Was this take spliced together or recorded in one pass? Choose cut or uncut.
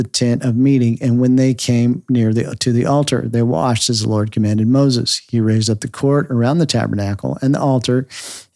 uncut